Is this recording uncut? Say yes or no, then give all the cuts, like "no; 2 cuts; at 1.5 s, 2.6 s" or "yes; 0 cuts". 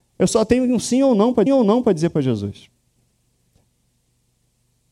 no; 1 cut; at 1.5 s